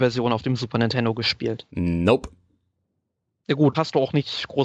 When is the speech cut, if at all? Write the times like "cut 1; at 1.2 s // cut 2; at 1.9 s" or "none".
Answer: cut 1; at 3.7 s